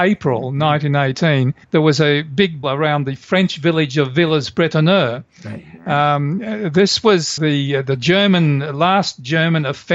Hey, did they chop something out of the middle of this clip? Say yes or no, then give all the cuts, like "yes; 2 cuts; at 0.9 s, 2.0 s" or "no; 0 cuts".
yes; 3 cuts; at 1.6 s, 2.6 s, 7.4 s